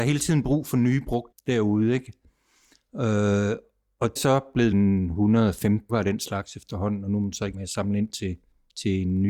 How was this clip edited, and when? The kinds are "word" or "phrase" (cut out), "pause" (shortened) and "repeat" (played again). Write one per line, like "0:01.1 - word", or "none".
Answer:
0:01.3 - word
0:04.2 - word
0:04.7 - word
0:05.9 - word
0:07.5 - word